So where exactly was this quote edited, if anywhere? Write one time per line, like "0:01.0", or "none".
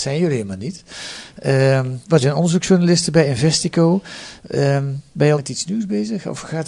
0:02.2
0:05.4